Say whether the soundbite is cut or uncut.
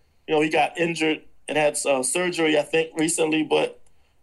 uncut